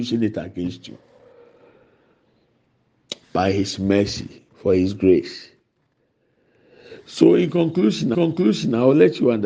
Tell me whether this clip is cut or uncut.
cut